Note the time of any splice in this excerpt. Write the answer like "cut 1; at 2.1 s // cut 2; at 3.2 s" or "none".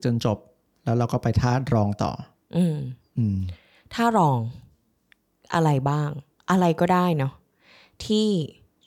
none